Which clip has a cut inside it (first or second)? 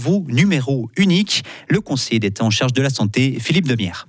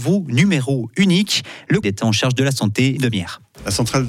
second